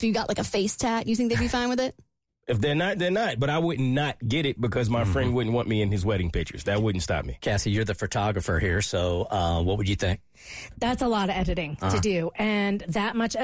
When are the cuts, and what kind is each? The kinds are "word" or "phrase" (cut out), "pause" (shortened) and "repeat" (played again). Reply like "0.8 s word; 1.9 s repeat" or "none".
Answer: none

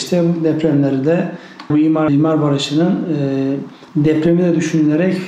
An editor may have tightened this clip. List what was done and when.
1.7 s word; 2.1 s word; 3.9 s pause

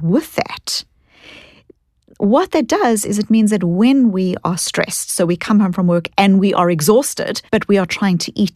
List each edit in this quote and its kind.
7.5 s pause

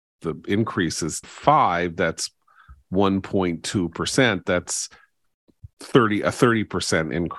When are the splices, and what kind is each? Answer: 1.2 s word; 5.7 s pause

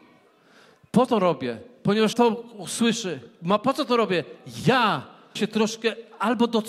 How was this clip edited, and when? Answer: 1.1 s word; 2.1 s word; 5.4 s word

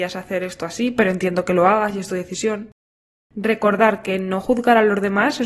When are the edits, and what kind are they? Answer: none

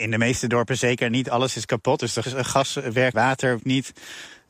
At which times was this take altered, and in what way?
2.2 s word; 3.1 s word; 3.6 s word

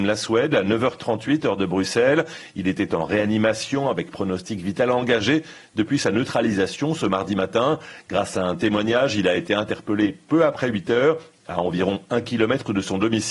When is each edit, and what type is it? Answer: none

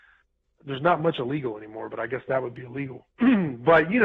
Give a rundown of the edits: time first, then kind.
none

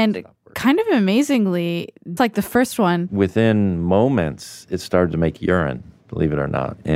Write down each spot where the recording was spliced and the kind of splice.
2.2 s word

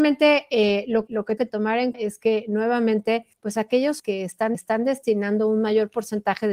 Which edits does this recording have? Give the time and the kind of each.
1.1 s word; 1.4 s word; 1.9 s word; 3.3 s pause; 4.0 s word; 4.5 s repeat

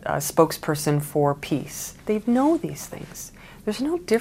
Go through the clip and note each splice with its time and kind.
2.0 s pause

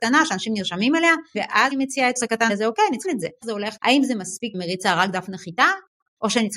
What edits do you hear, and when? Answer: 1.3 s word; 1.7 s word; 2.2 s word; 2.5 s word; 3.0 s word; 3.4 s word; 3.8 s word; 4.5 s word

